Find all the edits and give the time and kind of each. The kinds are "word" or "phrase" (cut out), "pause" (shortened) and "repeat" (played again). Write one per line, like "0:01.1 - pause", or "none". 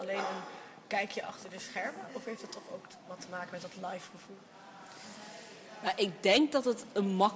none